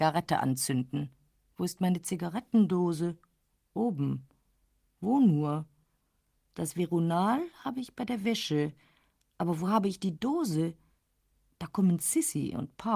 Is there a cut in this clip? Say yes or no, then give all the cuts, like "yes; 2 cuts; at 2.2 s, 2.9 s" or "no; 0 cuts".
no; 0 cuts